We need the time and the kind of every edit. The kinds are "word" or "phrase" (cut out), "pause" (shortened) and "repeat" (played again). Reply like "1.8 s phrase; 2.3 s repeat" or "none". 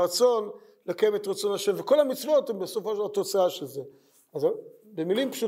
none